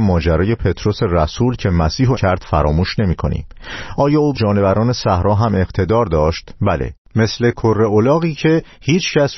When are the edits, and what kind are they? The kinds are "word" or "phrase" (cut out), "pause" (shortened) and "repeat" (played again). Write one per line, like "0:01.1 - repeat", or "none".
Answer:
0:02.1 - word
0:04.3 - word